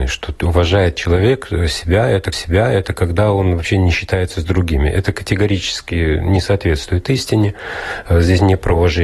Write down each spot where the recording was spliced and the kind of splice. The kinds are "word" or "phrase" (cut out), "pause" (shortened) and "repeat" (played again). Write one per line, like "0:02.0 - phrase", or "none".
0:02.3 - repeat